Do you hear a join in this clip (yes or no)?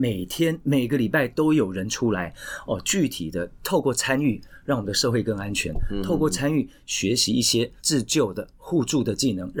yes